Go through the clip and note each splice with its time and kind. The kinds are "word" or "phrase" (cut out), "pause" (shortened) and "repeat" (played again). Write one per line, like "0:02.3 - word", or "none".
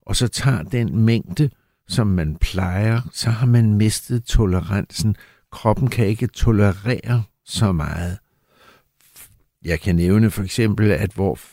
none